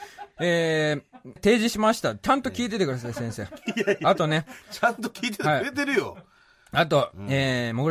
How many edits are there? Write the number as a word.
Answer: one